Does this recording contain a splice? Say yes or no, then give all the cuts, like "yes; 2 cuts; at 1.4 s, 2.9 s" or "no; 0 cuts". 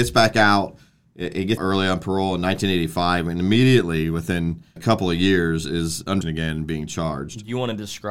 yes; 3 cuts; at 1.6 s, 4.8 s, 6.2 s